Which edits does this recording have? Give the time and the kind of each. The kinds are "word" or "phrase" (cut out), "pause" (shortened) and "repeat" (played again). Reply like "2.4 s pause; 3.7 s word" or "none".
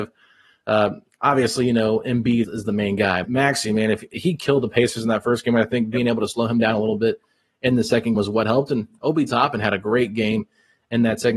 2.4 s word; 3.2 s word; 8.1 s word